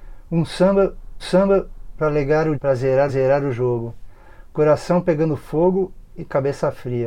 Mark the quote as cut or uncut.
cut